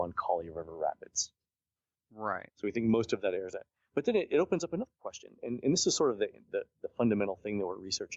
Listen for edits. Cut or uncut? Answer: uncut